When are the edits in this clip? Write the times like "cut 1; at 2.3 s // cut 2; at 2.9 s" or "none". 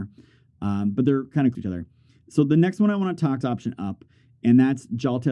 cut 1; at 1.5 s // cut 2; at 3.4 s